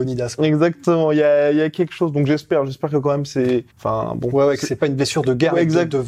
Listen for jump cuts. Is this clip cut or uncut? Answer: cut